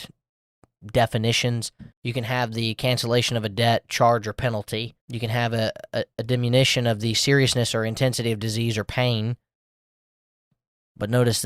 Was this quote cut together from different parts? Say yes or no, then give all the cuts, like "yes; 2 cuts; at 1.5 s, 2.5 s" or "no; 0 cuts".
yes; 2 cuts; at 1.9 s, 5.0 s